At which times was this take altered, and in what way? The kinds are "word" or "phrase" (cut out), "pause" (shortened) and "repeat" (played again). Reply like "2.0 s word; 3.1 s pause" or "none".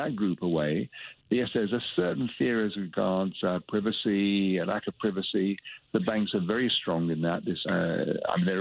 7.6 s word